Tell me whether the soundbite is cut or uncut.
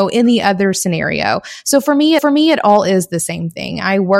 cut